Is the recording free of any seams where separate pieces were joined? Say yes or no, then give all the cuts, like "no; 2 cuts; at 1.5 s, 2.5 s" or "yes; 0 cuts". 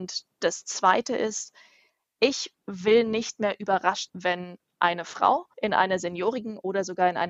no; 2 cuts; at 4.1 s, 5.5 s